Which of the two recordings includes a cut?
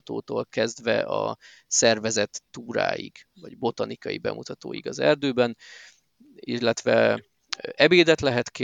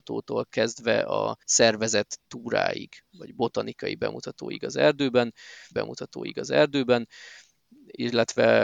second; 2 cuts; at 1.4 s, 5.7 s

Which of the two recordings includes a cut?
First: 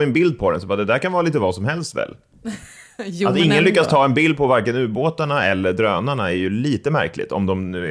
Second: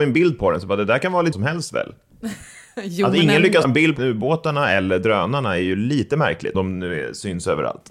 second; 4 cuts; at 1.3 s, 3.6 s, 4.0 s, 6.5 s

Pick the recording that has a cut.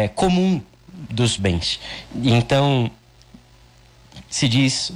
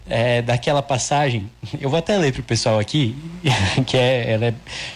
first; 1 cut; at 1.4 s

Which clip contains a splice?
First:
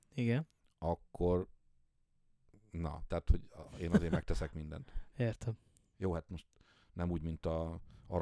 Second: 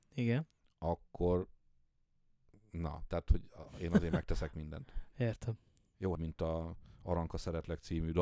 second; 1 cut; at 6.1 s

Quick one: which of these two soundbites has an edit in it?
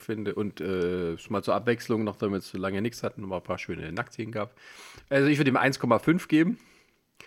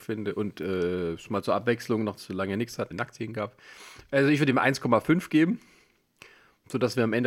second; 2 cuts; at 2.2 s, 2.9 s

